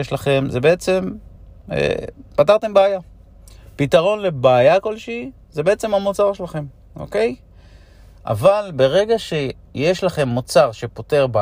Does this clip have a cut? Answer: no; 0 cuts

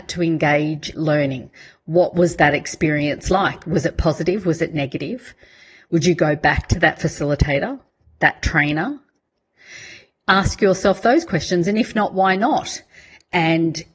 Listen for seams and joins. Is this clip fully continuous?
no; 1 cut; at 0.9 s

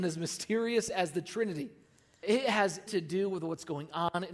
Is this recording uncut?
no; 2 cuts; at 2.2 s, 2.9 s

